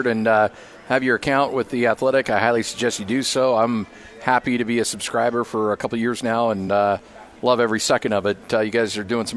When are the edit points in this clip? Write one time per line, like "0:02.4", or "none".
none